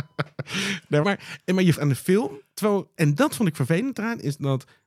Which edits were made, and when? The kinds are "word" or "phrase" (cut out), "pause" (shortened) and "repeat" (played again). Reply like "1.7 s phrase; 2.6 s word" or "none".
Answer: 1.0 s word; 1.7 s word; 3.0 s word